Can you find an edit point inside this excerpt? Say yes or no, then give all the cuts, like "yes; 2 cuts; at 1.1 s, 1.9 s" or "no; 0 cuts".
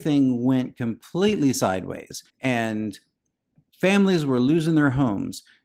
yes; 1 cut; at 2.3 s